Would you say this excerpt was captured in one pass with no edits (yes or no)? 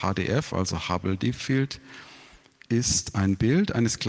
yes